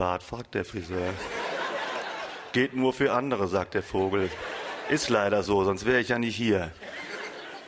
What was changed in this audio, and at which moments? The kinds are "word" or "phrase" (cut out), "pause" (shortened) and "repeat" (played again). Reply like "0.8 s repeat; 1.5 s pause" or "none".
none